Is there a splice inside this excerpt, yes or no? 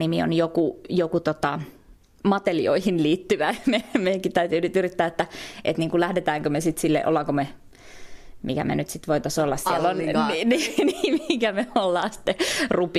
no